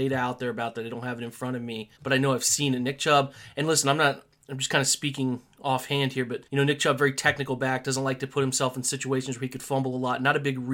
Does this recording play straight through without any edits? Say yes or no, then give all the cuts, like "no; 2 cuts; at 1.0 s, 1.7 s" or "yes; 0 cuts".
no; 2 cuts; at 2.0 s, 6.5 s